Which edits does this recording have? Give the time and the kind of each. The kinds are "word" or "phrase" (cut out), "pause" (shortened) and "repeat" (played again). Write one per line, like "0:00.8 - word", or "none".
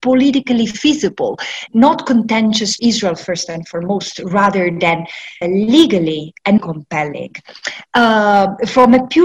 0:01.7 - word
0:02.8 - word
0:05.4 - word
0:06.6 - word